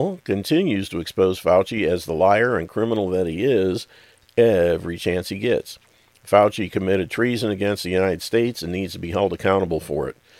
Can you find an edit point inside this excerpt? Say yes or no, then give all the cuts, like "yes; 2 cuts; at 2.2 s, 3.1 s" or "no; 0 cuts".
no; 0 cuts